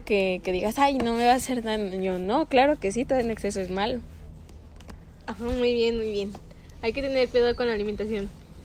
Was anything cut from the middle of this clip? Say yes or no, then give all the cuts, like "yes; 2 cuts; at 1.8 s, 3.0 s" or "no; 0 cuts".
no; 0 cuts